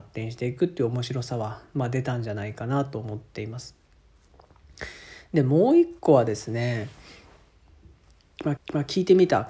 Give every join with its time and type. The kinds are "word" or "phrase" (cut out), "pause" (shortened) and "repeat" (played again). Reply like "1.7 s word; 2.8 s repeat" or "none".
8.6 s repeat